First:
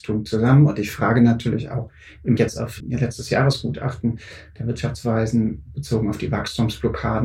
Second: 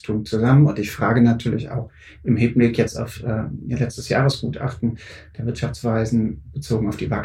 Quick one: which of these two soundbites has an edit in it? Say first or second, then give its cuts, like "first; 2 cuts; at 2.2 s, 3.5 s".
first; 2 cuts; at 2.4 s, 2.8 s